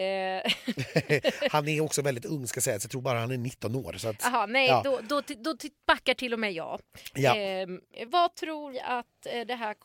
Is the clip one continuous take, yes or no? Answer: no